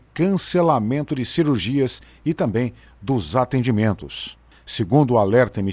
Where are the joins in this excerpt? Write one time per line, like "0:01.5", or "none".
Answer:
none